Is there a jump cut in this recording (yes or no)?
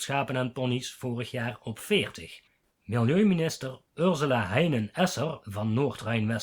no